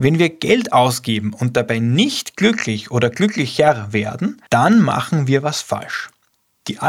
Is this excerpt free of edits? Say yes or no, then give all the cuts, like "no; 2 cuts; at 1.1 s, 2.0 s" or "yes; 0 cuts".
no; 1 cut; at 4.5 s